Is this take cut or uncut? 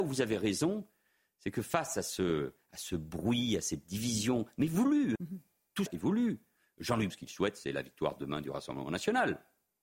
cut